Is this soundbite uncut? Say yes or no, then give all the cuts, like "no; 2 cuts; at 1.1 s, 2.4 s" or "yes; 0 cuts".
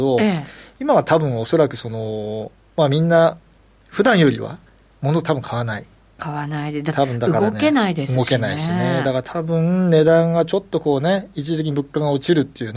yes; 0 cuts